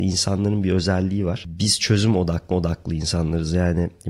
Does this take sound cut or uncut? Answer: cut